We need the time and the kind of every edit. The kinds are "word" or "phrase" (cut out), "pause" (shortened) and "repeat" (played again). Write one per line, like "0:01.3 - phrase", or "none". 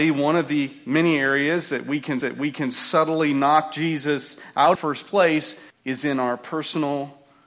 0:02.2 - repeat
0:04.8 - word
0:05.7 - pause